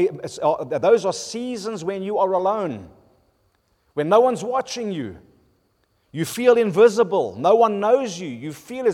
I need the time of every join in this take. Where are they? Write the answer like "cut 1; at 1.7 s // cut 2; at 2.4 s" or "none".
none